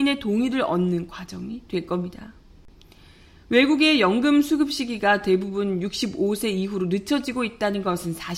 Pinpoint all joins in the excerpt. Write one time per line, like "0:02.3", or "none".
none